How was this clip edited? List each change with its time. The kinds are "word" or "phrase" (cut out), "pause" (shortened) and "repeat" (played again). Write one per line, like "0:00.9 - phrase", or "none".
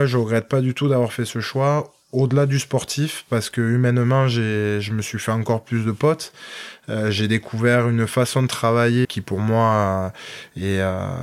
0:09.0 - word